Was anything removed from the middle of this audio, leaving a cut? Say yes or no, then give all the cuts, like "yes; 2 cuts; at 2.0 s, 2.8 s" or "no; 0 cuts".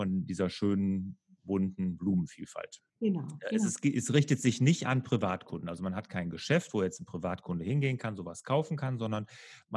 yes; 1 cut; at 2.9 s